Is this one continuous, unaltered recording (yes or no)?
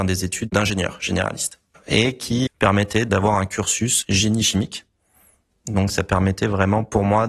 no